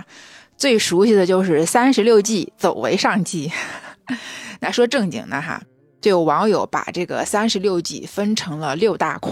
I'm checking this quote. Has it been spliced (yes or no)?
no